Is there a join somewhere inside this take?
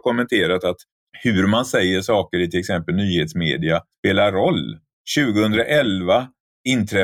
no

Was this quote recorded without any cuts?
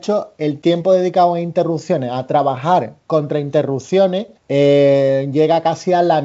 no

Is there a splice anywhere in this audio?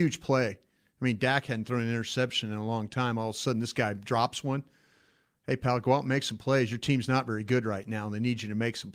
no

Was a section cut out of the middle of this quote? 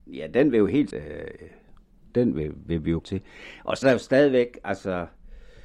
yes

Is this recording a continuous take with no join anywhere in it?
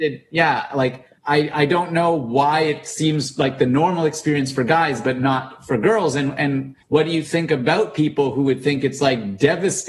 no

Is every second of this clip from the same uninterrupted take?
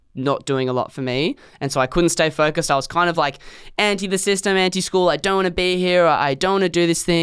yes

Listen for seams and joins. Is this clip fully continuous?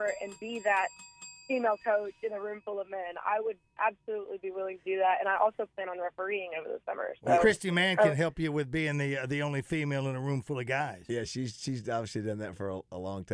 yes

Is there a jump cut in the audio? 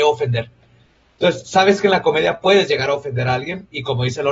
no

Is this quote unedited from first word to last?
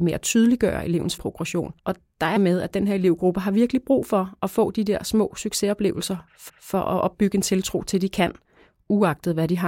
no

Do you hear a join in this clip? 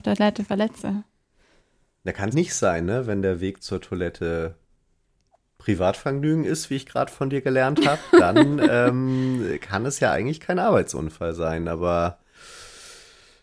yes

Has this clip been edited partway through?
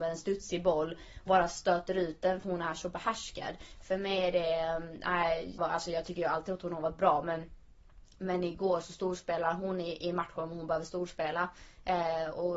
yes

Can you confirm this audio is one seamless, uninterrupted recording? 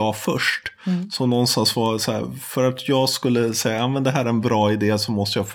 yes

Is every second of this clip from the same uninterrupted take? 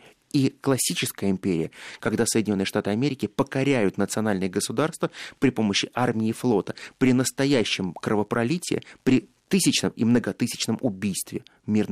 yes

